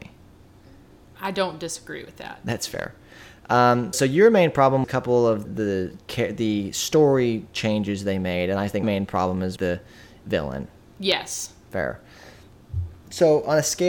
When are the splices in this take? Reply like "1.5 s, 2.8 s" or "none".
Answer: 3.9 s, 4.8 s, 5.4 s, 8.8 s, 9.6 s